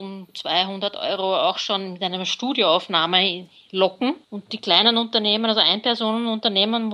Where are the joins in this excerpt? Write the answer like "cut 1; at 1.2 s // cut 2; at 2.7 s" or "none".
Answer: cut 1; at 4.2 s